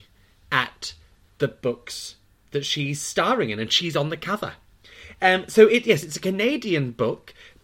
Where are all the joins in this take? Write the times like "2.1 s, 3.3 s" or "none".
none